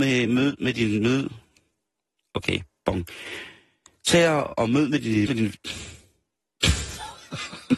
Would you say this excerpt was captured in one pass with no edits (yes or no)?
no